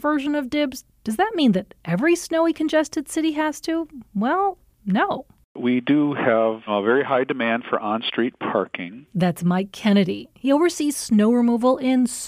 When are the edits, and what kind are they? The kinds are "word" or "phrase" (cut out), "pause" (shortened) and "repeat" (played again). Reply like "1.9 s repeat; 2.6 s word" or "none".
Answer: 4.1 s pause